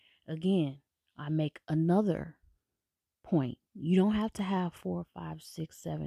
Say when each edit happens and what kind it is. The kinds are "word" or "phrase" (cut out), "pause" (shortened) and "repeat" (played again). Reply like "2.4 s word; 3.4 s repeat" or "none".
3.7 s pause